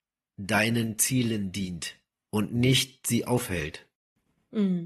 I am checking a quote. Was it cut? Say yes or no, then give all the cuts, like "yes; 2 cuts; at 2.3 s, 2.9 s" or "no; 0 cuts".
no; 0 cuts